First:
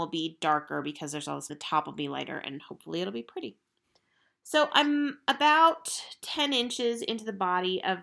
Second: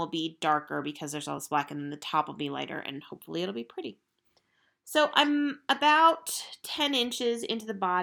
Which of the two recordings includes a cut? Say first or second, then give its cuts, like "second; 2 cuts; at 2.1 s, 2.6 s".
first; 1 cut; at 1.5 s